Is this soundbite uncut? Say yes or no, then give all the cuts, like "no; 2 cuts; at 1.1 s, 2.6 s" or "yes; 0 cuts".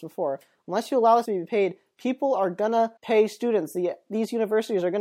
no; 2 cuts; at 1.2 s, 3.0 s